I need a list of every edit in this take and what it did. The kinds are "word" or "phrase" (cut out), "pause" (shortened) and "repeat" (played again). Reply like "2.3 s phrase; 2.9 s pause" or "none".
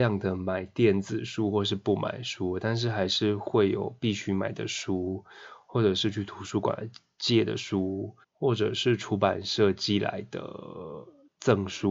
8.2 s pause